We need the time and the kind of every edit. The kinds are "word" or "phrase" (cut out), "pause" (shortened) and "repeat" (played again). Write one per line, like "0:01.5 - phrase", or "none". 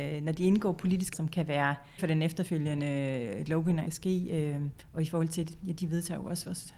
0:01.1 - word
0:02.0 - word
0:03.9 - phrase
0:04.8 - pause